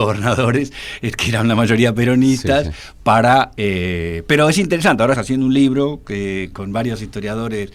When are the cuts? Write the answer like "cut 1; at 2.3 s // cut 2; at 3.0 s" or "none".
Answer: cut 1; at 5.1 s // cut 2; at 6.5 s

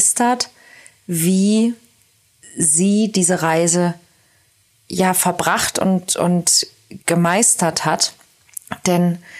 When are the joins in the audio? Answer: cut 1; at 7.0 s

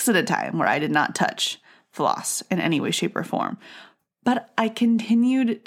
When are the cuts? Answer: none

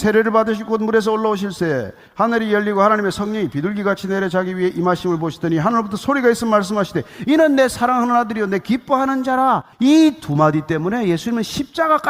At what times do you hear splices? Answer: cut 1; at 9.7 s

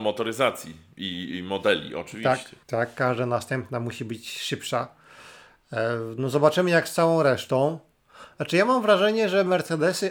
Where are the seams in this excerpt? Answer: cut 1; at 2.6 s

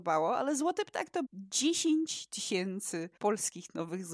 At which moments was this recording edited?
cut 1; at 1.2 s // cut 2; at 3.2 s

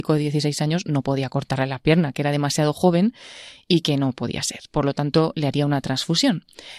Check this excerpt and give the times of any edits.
none

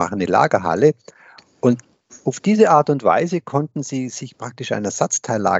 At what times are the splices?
none

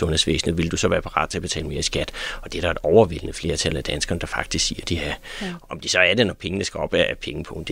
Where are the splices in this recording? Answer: none

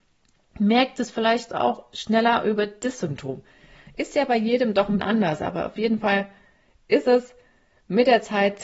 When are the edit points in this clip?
cut 1; at 5.0 s

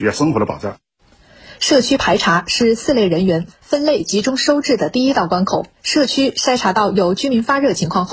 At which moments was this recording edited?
cut 1; at 5.7 s

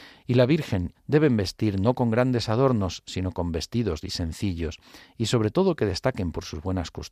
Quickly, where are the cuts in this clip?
cut 1; at 0.9 s // cut 2; at 4.0 s

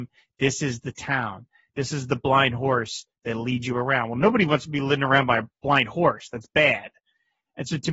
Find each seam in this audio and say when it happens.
none

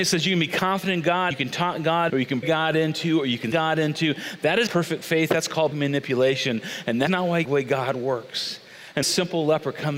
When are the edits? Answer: cut 1; at 1.3 s // cut 2; at 2.1 s // cut 3; at 2.4 s // cut 4; at 3.5 s // cut 5; at 4.7 s // cut 6; at 5.7 s // cut 7; at 7.1 s // cut 8; at 7.4 s // cut 9; at 9.0 s

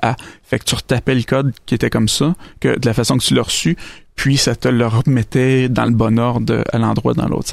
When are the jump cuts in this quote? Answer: none

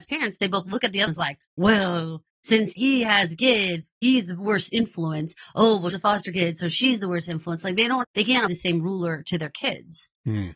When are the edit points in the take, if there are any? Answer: cut 1; at 1.1 s // cut 2; at 1.5 s // cut 3; at 5.9 s // cut 4; at 8.0 s // cut 5; at 8.5 s

